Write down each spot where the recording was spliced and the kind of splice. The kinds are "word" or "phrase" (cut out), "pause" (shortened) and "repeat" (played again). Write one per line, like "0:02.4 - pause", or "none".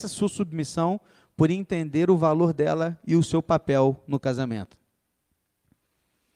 none